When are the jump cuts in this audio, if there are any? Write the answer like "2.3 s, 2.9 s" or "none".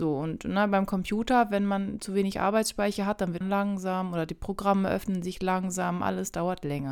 3.4 s